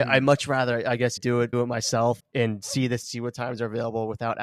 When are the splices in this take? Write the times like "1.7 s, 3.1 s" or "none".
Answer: 1.2 s, 1.5 s, 2.2 s, 3.0 s